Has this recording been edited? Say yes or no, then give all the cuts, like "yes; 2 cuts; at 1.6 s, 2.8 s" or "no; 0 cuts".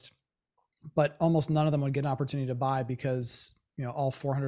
no; 0 cuts